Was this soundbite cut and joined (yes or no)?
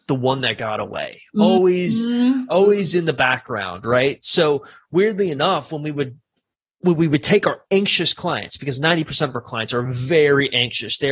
no